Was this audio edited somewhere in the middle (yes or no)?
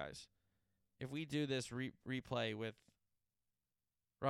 no